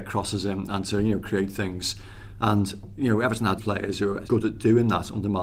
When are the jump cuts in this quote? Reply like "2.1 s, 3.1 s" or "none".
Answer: 3.6 s, 4.2 s